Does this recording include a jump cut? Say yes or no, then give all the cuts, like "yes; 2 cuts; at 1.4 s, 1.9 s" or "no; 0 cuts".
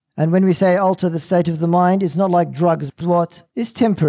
yes; 1 cut; at 3.0 s